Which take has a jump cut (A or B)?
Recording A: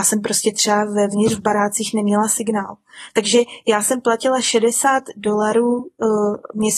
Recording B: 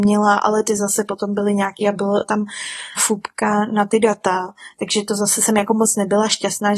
B